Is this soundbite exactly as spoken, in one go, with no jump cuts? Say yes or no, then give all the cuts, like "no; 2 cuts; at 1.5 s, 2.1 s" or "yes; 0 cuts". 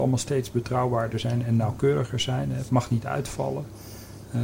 yes; 0 cuts